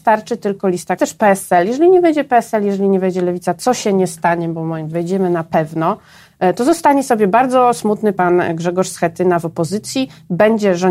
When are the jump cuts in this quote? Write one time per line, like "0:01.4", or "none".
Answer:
0:01.0
0:04.9